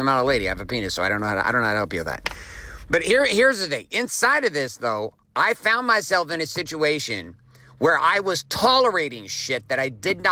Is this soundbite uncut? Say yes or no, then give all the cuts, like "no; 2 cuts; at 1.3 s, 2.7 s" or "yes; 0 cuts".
yes; 0 cuts